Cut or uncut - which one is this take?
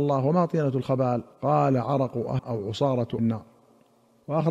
cut